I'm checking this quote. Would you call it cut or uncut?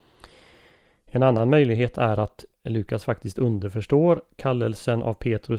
cut